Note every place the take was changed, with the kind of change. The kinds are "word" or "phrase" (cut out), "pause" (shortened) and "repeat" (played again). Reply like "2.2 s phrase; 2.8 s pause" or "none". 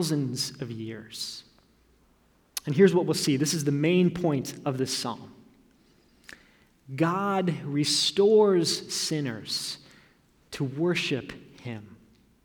none